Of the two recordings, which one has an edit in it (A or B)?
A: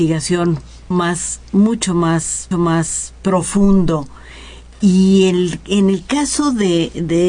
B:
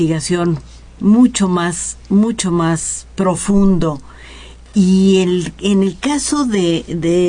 A